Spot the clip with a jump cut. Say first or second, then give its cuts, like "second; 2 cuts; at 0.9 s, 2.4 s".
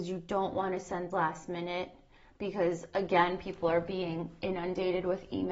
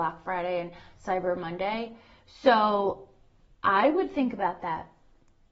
first; 1 cut; at 1.1 s